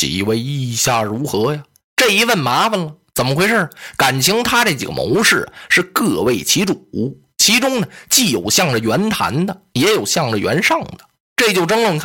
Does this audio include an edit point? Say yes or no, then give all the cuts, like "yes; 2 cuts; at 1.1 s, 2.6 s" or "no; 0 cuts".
no; 0 cuts